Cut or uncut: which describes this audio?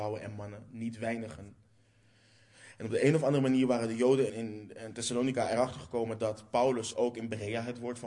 cut